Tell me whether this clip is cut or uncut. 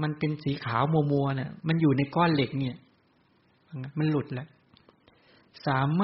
uncut